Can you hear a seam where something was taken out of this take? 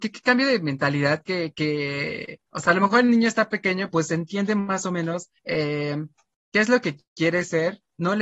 yes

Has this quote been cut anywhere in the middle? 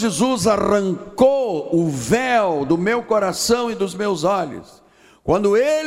no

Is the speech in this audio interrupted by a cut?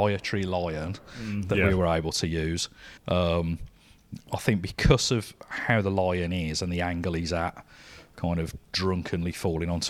yes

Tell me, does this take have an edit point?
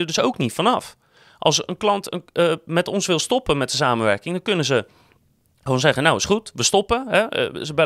no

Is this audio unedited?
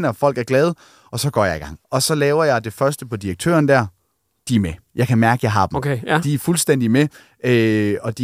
no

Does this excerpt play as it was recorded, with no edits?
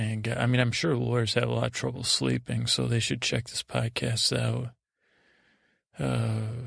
yes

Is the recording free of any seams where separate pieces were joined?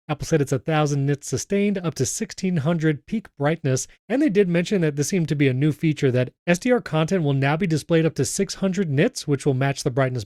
yes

